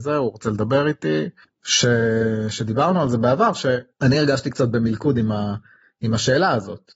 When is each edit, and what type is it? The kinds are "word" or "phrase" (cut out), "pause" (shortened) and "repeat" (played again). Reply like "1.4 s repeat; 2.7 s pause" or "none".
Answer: none